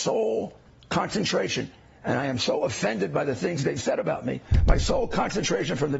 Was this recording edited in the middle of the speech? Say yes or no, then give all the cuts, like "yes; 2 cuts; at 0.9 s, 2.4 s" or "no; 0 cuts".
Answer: no; 0 cuts